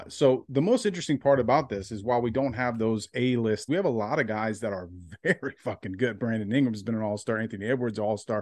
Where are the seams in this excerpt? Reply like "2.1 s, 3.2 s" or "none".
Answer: 3.7 s